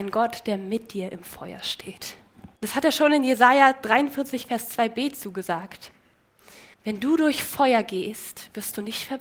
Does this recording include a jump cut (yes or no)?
yes